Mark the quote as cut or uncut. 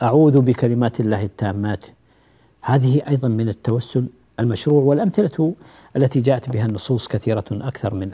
uncut